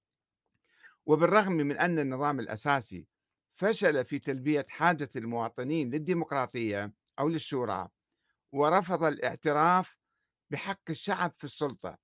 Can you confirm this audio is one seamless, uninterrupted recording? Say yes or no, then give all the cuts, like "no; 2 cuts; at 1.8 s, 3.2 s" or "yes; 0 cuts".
yes; 0 cuts